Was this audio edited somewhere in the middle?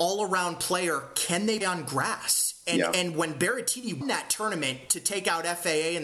yes; 2 cuts; at 1.6 s, 4.0 s

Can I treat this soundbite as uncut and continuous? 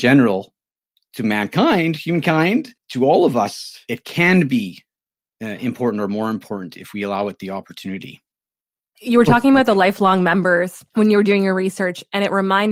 yes; 0 cuts

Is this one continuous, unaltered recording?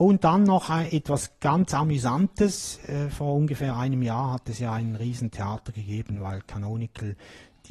yes; 0 cuts

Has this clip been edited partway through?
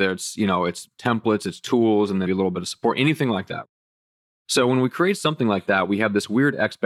yes; 1 cut; at 2.3 s

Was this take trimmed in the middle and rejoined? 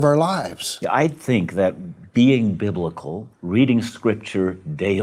yes; 1 cut; at 3.3 s

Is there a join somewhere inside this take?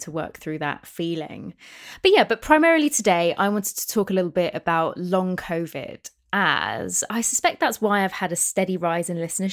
yes; 1 cut; at 7.1 s

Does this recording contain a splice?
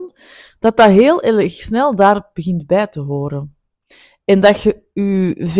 no; 0 cuts

